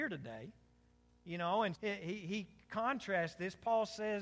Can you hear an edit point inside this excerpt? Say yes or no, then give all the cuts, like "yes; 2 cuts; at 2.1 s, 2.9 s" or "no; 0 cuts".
yes; 1 cut; at 1.8 s